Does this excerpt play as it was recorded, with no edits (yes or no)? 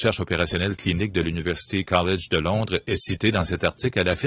yes